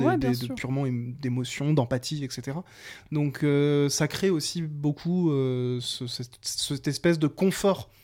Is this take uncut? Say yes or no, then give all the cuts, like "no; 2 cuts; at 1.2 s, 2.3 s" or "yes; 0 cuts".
yes; 0 cuts